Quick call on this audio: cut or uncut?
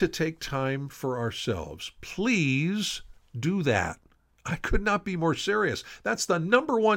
uncut